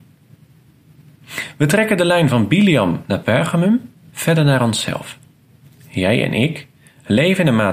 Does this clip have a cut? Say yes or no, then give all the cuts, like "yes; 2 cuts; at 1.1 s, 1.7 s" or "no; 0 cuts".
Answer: yes; 1 cut; at 5.5 s